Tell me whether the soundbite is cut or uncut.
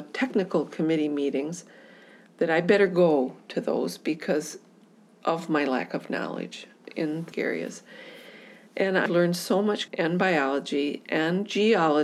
cut